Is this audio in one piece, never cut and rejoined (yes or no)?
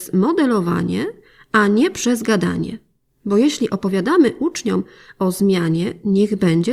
yes